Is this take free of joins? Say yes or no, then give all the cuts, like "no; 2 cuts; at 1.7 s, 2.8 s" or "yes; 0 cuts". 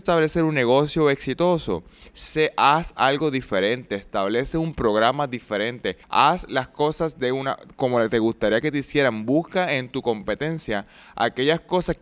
no; 1 cut; at 6.0 s